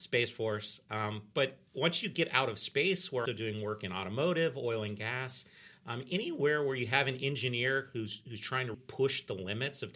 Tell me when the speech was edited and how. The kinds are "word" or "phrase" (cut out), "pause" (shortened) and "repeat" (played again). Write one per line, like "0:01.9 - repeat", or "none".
0:03.3 - word
0:08.7 - word

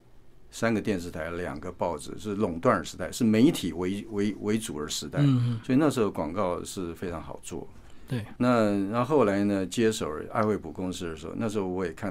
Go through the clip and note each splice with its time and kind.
0:08.4 - word

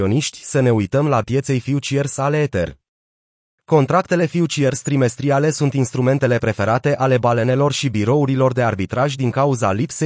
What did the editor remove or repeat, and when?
0:01.2 - word

